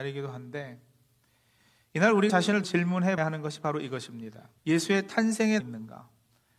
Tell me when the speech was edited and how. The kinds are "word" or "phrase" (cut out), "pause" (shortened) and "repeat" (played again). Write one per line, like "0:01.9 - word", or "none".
0:02.3 - word
0:02.6 - word
0:03.2 - word
0:04.6 - pause
0:05.6 - phrase

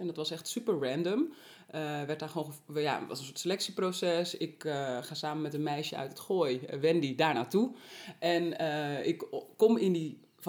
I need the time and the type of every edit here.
none

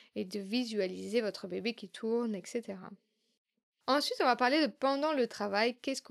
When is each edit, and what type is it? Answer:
none

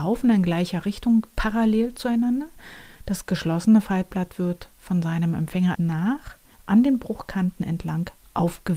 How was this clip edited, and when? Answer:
0:05.7 - phrase
0:06.5 - pause

